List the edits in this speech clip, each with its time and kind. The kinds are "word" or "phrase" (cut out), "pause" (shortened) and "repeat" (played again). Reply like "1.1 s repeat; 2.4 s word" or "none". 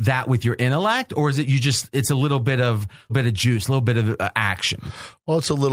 3.1 s word